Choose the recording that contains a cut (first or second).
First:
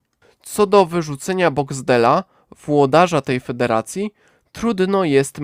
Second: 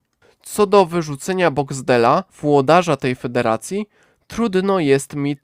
second